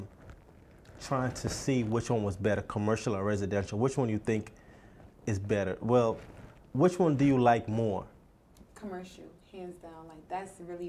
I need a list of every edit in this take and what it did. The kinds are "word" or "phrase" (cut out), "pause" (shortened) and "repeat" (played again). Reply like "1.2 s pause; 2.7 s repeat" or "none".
6.6 s pause